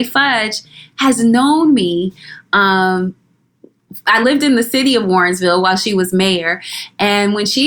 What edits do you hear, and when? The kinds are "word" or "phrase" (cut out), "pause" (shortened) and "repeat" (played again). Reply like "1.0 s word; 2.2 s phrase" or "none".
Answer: none